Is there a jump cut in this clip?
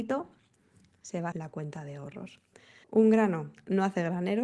yes; 2 cuts; at 1.3 s, 2.8 s

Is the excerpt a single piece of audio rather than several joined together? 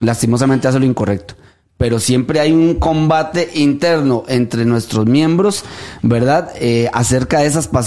yes; 0 cuts

